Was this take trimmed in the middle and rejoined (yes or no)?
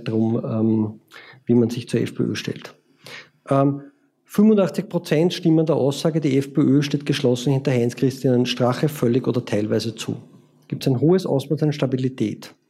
no